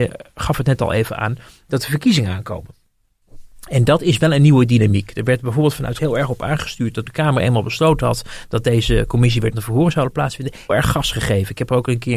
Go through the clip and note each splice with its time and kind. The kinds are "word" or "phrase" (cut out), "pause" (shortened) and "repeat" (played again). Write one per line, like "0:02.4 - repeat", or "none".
0:06.0 - word
0:07.1 - word
0:09.5 - word
0:10.7 - word